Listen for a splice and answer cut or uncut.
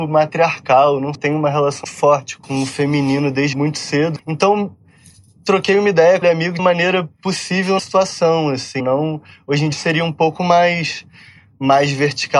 cut